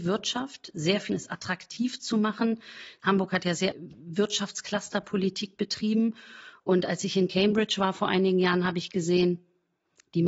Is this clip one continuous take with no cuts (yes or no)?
no